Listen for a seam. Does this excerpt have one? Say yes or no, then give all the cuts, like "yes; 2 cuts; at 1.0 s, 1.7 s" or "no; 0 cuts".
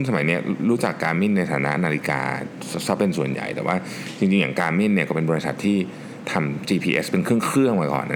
no; 0 cuts